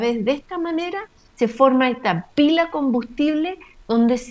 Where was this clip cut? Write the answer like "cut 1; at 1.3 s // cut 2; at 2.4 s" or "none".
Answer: none